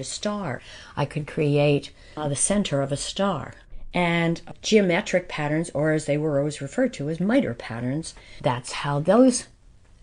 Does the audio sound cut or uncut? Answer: uncut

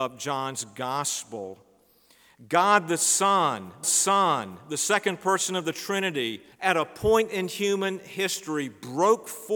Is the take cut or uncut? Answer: cut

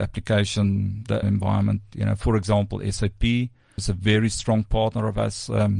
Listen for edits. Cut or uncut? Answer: cut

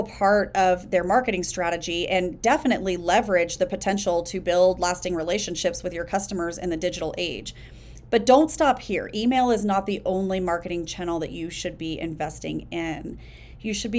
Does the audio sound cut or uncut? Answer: uncut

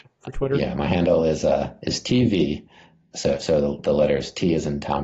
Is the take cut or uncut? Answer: uncut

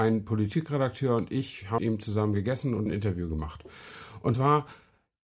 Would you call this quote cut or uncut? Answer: cut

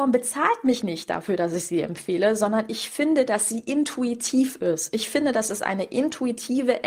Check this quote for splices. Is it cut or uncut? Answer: uncut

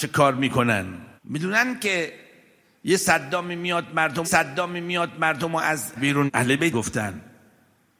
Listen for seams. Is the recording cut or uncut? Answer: cut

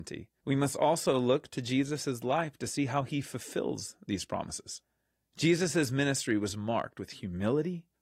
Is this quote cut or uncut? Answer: uncut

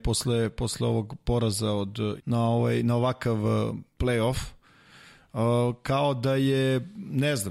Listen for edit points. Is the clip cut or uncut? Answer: cut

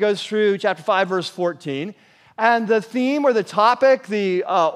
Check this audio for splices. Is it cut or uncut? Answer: uncut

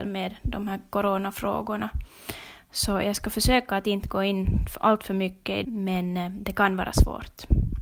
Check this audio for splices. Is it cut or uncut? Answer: cut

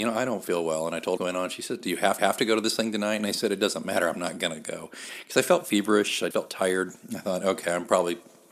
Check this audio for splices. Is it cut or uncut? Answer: cut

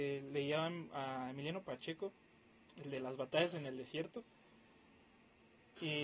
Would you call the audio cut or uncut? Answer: uncut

